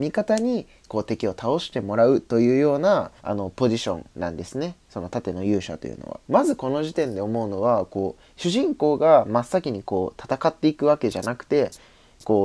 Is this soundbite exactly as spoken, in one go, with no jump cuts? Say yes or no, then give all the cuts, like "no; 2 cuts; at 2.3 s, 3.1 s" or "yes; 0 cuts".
no; 3 cuts; at 3.2 s, 4.1 s, 6.2 s